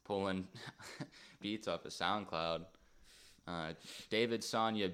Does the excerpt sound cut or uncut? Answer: cut